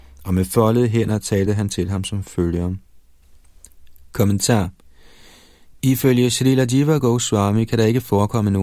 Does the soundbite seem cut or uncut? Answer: uncut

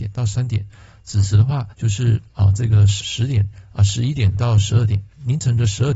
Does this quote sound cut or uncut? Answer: cut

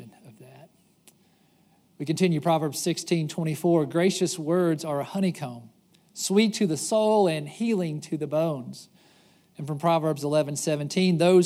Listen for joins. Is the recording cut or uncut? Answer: uncut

